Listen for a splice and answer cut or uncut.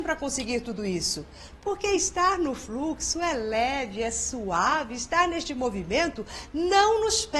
uncut